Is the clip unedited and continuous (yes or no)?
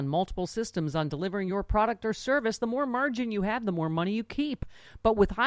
yes